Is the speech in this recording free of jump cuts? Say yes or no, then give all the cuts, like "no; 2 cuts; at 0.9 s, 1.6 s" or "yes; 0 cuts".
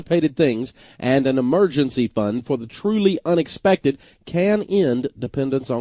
yes; 0 cuts